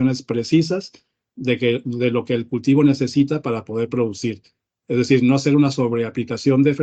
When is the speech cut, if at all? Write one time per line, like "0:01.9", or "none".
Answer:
none